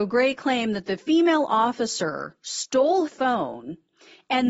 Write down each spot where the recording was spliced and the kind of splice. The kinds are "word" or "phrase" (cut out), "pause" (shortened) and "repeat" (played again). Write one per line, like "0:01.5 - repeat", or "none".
0:03.1 - word

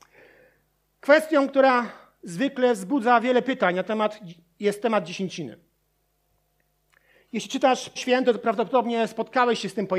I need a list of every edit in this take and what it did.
0:08.0 - word

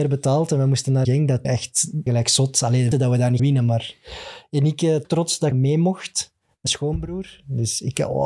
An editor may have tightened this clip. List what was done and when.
0:01.0 - word
0:01.4 - word
0:02.1 - word
0:02.9 - word
0:03.4 - word
0:05.0 - word
0:05.5 - word
0:06.7 - word

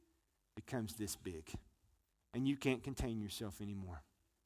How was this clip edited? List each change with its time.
none

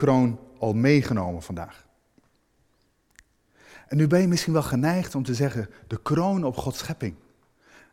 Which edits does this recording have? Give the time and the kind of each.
none

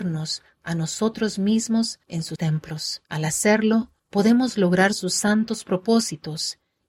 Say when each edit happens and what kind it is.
0:02.0 - pause
0:02.3 - word
0:03.0 - pause
0:04.0 - pause

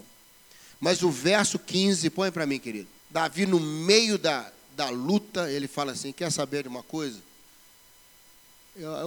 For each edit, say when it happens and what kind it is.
0:03.0 - pause

